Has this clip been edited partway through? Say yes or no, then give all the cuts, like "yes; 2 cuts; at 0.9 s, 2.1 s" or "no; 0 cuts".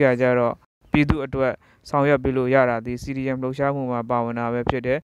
no; 0 cuts